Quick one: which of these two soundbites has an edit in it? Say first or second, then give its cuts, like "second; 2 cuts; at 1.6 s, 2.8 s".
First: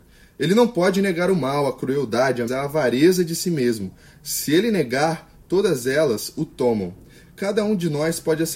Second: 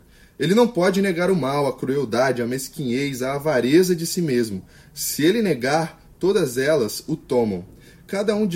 first; 1 cut; at 2.5 s